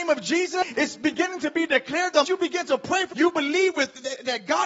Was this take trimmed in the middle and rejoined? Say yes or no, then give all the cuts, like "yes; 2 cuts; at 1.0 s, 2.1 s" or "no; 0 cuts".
yes; 2 cuts; at 2.2 s, 3.1 s